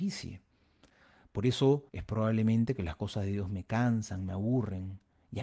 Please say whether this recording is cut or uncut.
cut